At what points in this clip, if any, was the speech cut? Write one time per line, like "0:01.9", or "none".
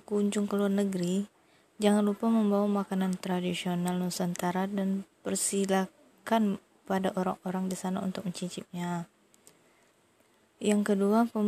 0:05.1